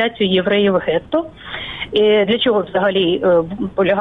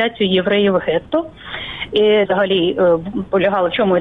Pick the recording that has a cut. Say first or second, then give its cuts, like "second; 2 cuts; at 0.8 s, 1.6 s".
second; 1 cut; at 2.3 s